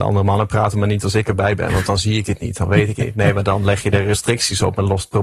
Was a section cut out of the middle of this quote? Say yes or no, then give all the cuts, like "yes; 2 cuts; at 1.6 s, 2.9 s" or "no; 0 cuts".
no; 0 cuts